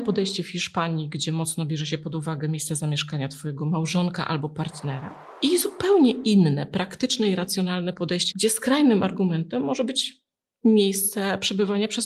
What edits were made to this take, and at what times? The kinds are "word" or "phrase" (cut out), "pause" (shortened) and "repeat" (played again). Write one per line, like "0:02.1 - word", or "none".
0:08.3 - phrase

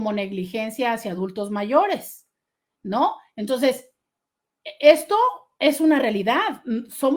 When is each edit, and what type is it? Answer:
none

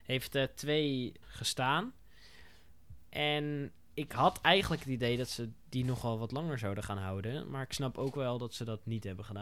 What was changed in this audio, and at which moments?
0:01.2 - word

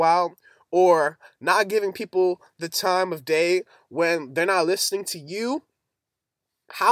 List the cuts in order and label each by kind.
none

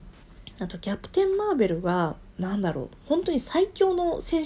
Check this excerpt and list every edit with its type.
0:02.3 - pause

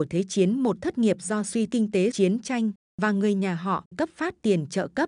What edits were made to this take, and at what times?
0:01.7 - word
0:02.1 - word
0:03.9 - word

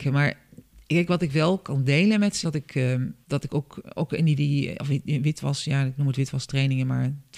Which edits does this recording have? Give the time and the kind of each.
0:02.4 - word
0:03.2 - word
0:04.4 - word

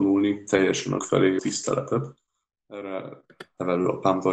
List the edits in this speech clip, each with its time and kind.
0:01.0 - word
0:01.4 - word

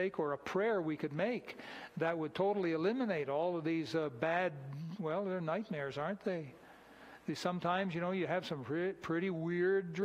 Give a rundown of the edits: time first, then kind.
none

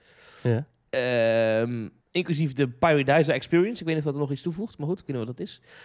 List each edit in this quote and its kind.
0:02.0 - pause

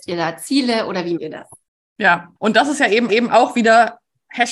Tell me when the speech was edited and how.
0:01.2 - word
0:02.4 - pause
0:03.1 - repeat

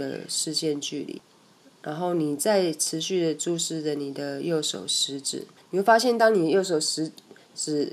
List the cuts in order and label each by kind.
0:05.6 - pause

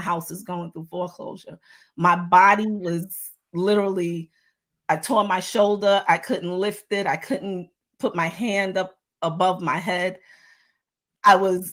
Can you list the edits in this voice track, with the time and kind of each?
none

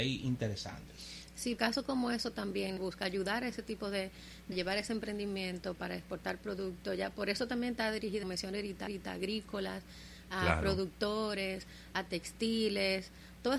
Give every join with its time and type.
0:01.6 - word
0:02.8 - phrase
0:04.5 - phrase
0:08.2 - phrase
0:08.9 - repeat

